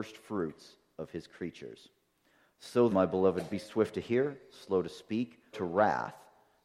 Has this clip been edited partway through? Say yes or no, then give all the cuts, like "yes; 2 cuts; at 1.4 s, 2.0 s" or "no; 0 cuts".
yes; 3 cuts; at 2.9 s, 3.5 s, 5.5 s